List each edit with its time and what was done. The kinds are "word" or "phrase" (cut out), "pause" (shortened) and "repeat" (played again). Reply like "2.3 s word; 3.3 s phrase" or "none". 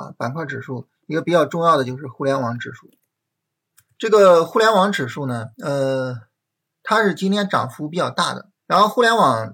1.0 s pause; 3.5 s pause; 5.5 s pause; 8.6 s pause